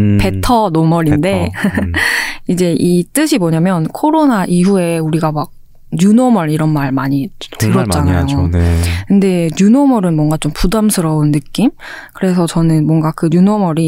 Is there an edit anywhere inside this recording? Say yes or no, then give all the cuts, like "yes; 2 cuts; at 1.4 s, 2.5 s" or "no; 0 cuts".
no; 0 cuts